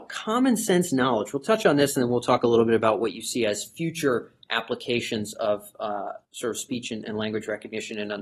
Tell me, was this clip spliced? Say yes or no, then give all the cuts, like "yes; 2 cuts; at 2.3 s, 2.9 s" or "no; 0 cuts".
yes; 1 cut; at 6.2 s